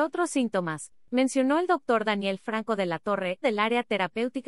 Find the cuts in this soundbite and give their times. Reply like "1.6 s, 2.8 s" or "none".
3.4 s